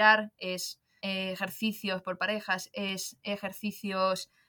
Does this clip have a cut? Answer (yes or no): yes